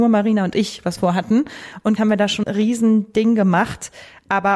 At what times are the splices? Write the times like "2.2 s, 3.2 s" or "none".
1.0 s, 2.0 s, 2.4 s